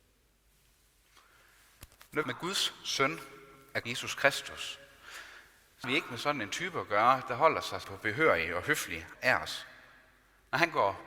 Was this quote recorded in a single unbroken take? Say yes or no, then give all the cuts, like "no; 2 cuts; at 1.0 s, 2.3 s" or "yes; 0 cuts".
no; 5 cuts; at 2.2 s, 3.8 s, 5.8 s, 7.8 s, 9.1 s